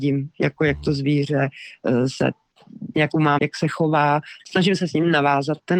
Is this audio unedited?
no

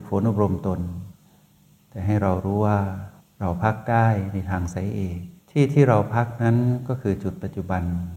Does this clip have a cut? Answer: yes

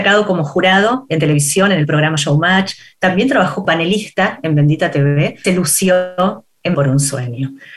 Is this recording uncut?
no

